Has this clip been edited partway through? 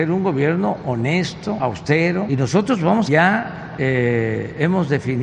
yes; 1 cut; at 3.1 s

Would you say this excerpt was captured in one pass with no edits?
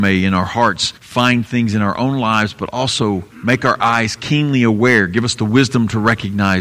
no; 2 cuts; at 1.0 s, 3.3 s

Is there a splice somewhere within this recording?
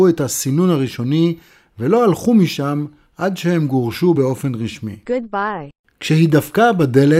no; 0 cuts

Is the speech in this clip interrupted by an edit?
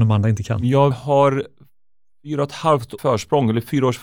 yes; 2 cuts; at 0.9 s, 3.0 s

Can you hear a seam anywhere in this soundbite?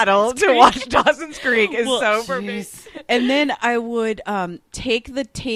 no; 0 cuts

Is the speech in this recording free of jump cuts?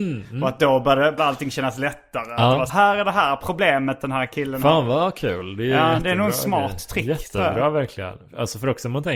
no; 2 cuts; at 1.2 s, 2.7 s

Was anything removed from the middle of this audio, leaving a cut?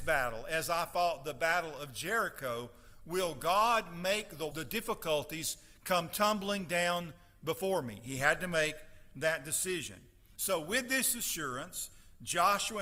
yes; 1 cut; at 4.5 s

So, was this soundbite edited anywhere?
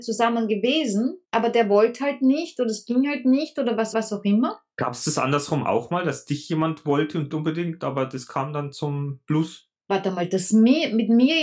yes; 4 cuts; at 1.2 s, 3.9 s, 7.3 s, 9.8 s

